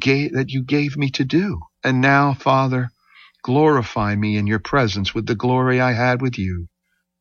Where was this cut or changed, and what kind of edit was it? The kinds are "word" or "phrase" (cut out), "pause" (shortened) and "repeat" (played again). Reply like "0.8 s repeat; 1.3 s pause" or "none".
1.7 s pause